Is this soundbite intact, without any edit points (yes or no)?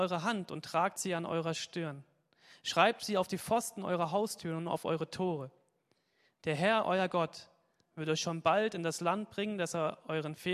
yes